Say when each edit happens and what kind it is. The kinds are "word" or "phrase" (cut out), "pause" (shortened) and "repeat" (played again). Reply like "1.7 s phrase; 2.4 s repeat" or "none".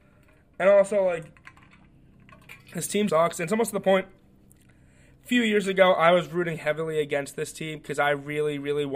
2.6 s pause; 3.1 s word